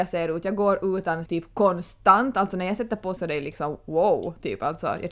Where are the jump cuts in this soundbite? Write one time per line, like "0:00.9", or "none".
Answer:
0:01.3
0:03.2